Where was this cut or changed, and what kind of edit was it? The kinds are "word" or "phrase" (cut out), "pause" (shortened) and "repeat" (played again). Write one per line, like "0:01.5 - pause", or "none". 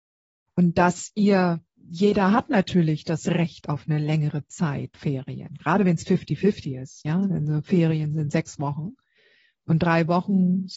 0:01.7 - pause